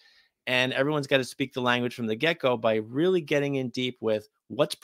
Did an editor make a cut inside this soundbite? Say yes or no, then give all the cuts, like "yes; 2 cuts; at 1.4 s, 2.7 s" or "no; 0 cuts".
no; 0 cuts